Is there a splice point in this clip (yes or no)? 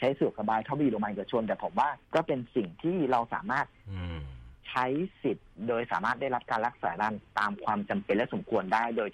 yes